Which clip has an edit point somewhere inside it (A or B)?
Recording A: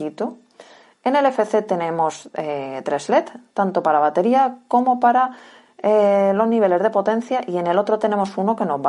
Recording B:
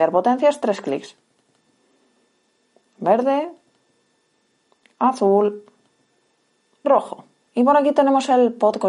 B